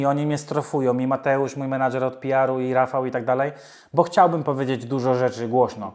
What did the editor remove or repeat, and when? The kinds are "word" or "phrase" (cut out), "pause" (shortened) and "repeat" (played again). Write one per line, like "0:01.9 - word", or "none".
none